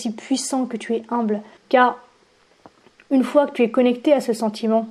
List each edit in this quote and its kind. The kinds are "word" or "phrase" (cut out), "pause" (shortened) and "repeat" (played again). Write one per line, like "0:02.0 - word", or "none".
0:01.6 - pause